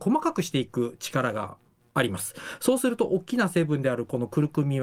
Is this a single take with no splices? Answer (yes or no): yes